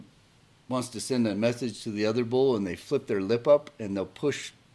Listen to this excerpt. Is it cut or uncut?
uncut